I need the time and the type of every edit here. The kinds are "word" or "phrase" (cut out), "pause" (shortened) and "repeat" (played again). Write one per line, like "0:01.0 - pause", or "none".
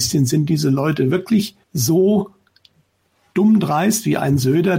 0:01.6 - pause